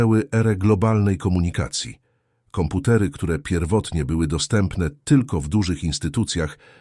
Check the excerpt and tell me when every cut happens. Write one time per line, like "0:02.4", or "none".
none